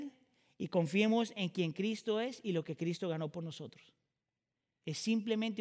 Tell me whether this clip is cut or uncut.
uncut